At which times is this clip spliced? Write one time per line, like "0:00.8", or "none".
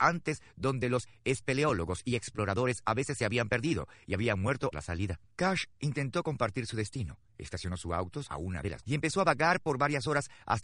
0:04.7
0:05.3
0:07.3
0:08.3
0:08.8